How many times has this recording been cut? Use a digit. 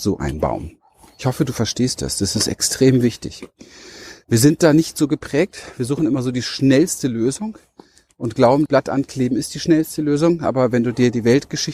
1